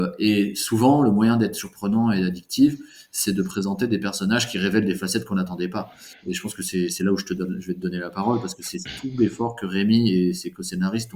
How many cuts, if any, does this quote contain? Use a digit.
0